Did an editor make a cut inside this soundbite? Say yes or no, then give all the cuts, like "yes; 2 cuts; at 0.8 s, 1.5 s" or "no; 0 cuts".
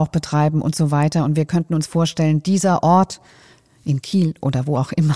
no; 0 cuts